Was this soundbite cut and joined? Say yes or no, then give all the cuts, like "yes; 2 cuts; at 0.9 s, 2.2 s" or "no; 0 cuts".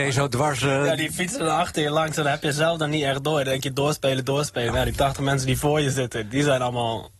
no; 0 cuts